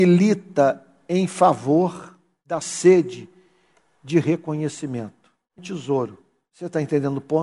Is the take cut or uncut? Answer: cut